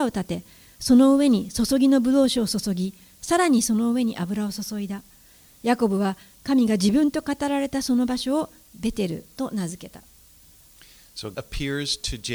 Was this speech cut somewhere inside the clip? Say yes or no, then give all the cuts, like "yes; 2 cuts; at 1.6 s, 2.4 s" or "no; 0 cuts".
yes; 1 cut; at 11.3 s